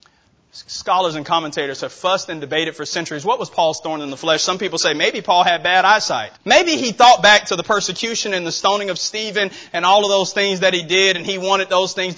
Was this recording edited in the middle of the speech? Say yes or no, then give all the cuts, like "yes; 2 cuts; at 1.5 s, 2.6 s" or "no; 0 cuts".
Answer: yes; 1 cut; at 6.4 s